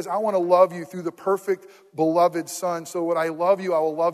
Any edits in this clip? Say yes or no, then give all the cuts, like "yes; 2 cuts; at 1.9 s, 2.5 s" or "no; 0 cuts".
no; 0 cuts